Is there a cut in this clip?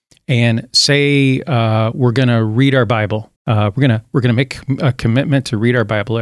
yes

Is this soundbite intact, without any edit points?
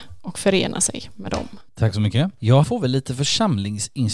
no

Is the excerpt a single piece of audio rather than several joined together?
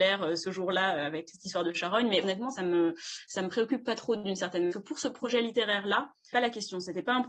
no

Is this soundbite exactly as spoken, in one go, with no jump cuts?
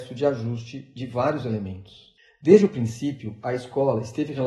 yes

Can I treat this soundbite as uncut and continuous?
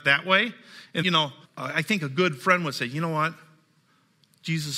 no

